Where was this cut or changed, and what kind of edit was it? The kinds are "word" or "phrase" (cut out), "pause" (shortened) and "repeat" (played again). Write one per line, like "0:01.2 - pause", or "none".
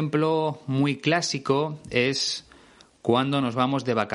none